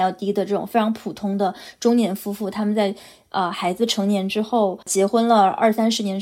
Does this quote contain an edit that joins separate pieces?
yes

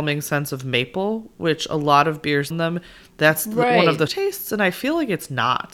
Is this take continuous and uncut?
no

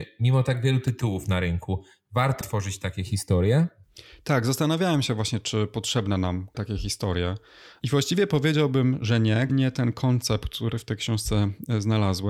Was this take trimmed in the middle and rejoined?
yes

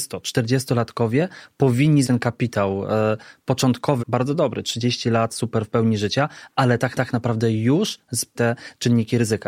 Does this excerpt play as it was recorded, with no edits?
no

